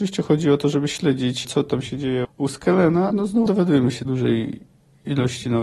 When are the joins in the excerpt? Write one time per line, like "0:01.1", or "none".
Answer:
0:01.4
0:02.2
0:03.1
0:03.5
0:04.1